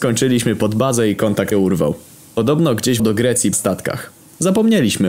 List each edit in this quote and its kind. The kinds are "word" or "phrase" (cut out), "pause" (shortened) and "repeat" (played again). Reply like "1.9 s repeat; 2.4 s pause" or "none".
1.5 s word; 3.0 s word; 3.5 s phrase